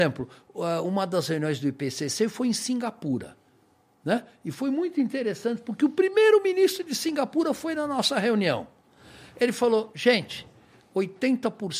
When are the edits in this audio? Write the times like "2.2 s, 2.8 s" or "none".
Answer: none

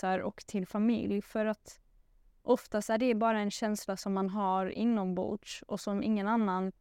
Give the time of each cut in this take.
none

